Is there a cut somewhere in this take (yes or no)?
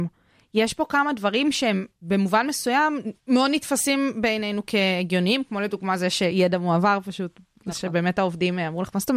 yes